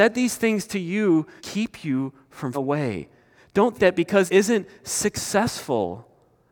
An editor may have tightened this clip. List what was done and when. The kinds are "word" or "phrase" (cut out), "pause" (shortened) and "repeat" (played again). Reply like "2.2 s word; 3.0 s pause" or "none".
1.4 s word; 2.5 s word; 3.7 s word; 4.3 s word